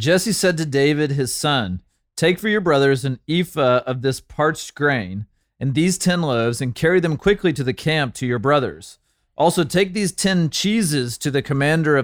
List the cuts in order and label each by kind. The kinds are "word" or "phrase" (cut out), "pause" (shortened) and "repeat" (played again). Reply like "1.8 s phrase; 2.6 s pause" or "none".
none